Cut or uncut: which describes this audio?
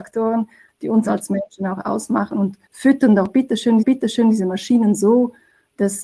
cut